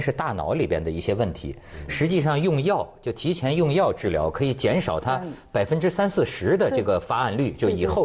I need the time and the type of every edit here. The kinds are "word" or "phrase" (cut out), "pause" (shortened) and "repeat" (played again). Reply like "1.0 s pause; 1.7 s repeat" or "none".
none

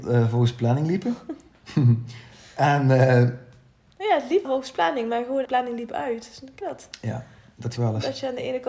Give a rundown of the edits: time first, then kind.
4.4 s word; 5.4 s word; 6.6 s word; 7.8 s word

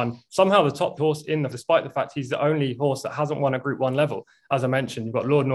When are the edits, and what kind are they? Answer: 1.0 s word; 1.5 s word

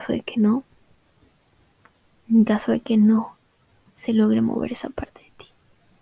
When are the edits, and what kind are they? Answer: none

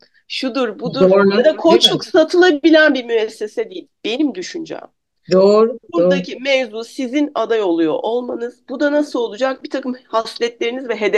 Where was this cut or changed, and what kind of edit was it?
none

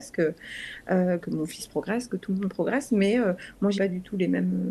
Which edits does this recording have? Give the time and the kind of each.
3.8 s word

